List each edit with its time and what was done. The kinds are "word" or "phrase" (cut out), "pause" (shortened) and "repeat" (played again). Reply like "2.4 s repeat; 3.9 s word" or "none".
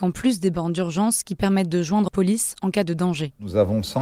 2.1 s word